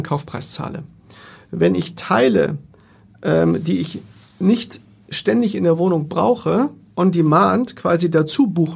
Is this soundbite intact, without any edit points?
yes; 0 cuts

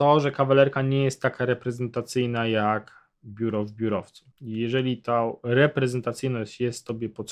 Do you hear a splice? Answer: yes; 1 cut; at 4.3 s

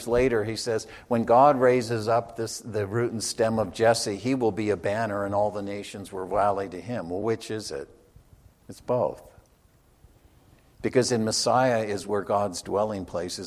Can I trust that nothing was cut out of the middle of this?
yes; 0 cuts

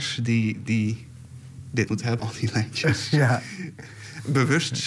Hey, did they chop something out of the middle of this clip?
yes; 2 cuts; at 1.9 s, 2.2 s

